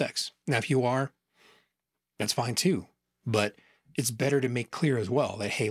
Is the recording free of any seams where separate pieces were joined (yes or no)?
no